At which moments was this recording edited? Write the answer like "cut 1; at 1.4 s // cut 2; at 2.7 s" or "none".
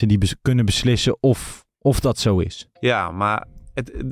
cut 1; at 1.7 s // cut 2; at 2.8 s